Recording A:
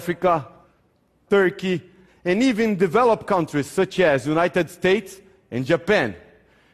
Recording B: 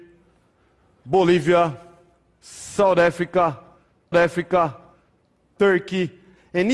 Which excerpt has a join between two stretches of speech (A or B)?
B